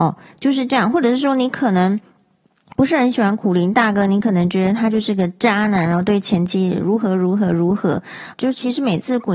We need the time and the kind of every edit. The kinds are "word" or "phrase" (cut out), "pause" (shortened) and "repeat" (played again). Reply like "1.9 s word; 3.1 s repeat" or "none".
2.8 s word; 8.3 s word